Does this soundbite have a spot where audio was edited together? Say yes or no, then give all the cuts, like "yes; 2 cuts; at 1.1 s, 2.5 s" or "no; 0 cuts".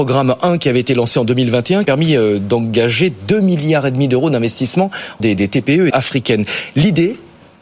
yes; 3 cuts; at 1.8 s, 5.2 s, 5.9 s